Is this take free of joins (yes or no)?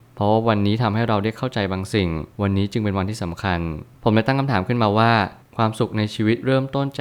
no